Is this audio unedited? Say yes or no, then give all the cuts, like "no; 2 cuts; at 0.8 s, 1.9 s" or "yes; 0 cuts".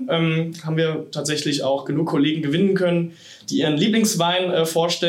yes; 0 cuts